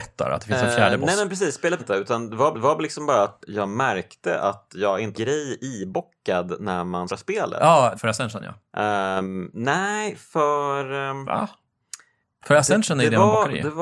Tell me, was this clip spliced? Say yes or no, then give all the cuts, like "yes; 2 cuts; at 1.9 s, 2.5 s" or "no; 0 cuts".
yes; 7 cuts; at 1.8 s, 2.5 s, 3.4 s, 5.1 s, 7.1 s, 7.9 s, 12.2 s